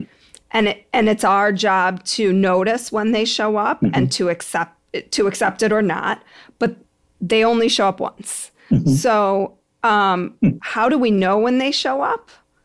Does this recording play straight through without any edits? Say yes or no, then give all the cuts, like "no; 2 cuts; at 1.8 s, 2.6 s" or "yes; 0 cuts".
yes; 0 cuts